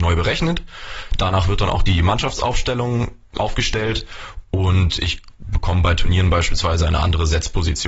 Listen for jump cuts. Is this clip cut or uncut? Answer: cut